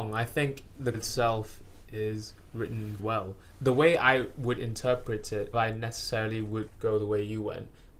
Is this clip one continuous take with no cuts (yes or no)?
no